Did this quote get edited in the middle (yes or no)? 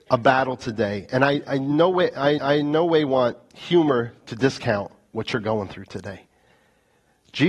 yes